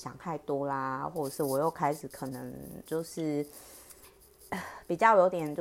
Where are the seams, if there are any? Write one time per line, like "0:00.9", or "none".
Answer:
0:02.9